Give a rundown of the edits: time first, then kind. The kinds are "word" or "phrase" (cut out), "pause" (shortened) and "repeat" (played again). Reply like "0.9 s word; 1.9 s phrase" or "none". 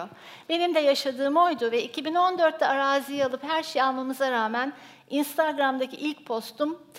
none